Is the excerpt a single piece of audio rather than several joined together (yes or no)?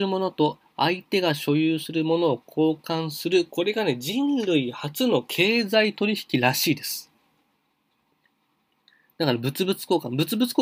yes